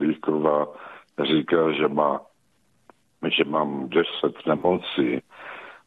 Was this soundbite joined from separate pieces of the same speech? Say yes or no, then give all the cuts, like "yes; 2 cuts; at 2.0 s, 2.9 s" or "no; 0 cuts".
no; 0 cuts